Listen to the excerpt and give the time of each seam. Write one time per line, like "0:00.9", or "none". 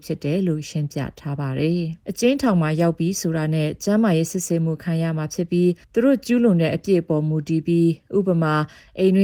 0:02.0
0:05.8